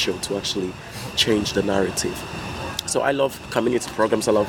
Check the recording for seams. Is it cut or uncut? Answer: uncut